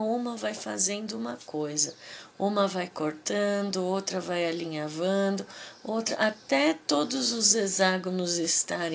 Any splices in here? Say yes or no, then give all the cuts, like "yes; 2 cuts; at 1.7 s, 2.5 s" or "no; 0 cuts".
no; 0 cuts